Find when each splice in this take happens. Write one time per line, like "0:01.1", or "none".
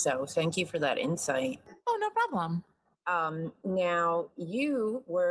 none

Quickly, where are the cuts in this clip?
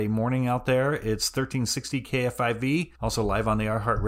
0:03.0

